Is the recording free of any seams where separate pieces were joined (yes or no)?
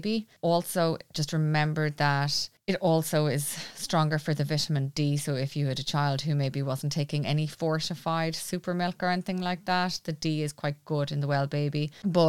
yes